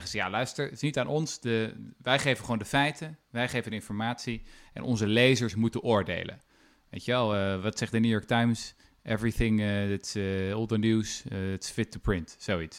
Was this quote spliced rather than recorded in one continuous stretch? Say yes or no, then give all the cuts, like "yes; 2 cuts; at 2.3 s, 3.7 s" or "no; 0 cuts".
no; 0 cuts